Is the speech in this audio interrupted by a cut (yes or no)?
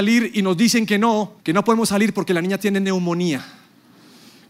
yes